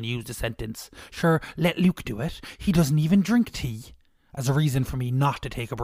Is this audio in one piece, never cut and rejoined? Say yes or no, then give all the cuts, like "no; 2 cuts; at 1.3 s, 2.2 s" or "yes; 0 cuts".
yes; 0 cuts